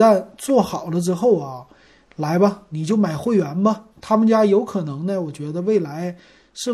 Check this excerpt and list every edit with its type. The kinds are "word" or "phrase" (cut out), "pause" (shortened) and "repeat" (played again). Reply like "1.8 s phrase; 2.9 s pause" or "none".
3.9 s pause